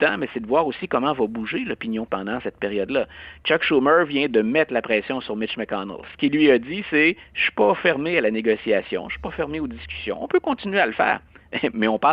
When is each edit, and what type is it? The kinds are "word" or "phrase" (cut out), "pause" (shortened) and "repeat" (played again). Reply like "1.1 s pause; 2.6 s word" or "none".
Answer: 2.1 s word; 2.4 s word